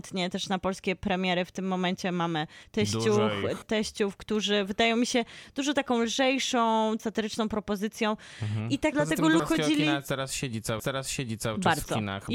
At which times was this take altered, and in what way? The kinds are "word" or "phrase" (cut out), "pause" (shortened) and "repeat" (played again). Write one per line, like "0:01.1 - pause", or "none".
0:03.6 - word
0:07.0 - phrase
0:08.9 - word
0:09.4 - word
0:10.8 - repeat